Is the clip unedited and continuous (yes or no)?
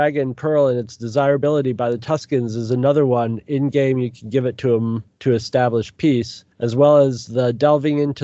no